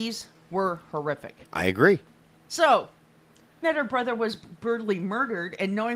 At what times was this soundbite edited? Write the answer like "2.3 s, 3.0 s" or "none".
1.4 s, 2.5 s, 3.6 s